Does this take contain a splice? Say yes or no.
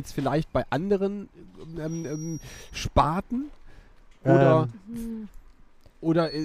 no